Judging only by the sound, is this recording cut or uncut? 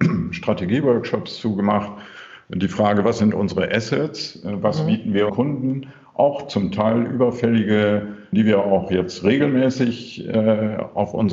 cut